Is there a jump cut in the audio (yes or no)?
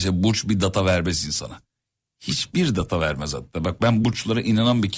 no